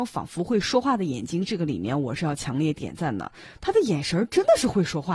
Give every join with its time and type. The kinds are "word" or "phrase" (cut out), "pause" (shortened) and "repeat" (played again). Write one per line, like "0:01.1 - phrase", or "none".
none